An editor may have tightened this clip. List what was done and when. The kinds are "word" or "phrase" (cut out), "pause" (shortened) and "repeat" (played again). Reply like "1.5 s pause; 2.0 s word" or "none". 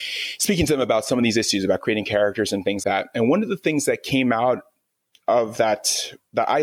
2.8 s word

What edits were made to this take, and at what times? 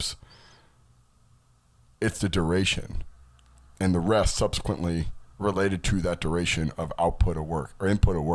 none

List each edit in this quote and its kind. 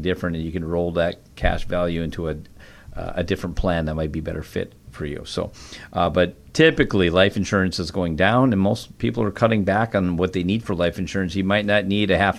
none

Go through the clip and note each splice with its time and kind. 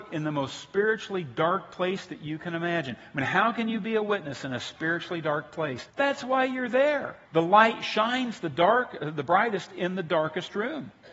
5.9 s pause; 7.2 s pause

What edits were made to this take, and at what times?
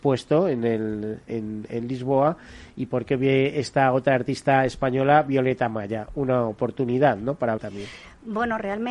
1.3 s word; 7.6 s word

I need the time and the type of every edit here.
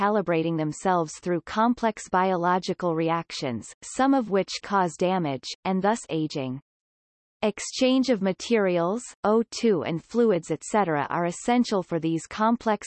4.6 s word; 9.2 s word

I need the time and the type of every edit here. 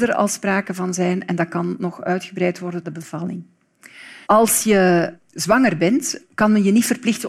2.8 s phrase; 4.2 s pause

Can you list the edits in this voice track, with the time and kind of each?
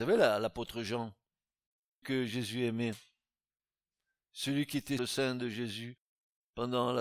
2.0 s word; 5.0 s word

